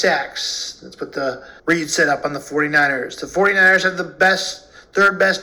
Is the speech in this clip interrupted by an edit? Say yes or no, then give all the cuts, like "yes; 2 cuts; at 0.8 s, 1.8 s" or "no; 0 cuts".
yes; 1 cut; at 1.6 s